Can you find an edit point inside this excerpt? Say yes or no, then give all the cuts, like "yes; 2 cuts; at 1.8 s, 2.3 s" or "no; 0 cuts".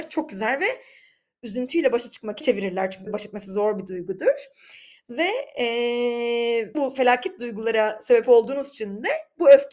yes; 3 cuts; at 2.4 s, 3.1 s, 6.7 s